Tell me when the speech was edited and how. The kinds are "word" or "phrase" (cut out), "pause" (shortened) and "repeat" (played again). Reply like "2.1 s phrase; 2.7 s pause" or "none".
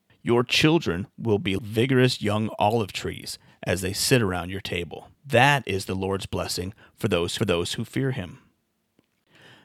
1.6 s word; 5.1 s pause; 7.4 s repeat